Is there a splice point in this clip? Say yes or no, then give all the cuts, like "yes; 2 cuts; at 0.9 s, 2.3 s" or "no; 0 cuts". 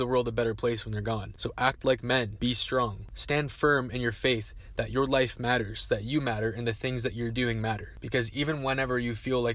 no; 0 cuts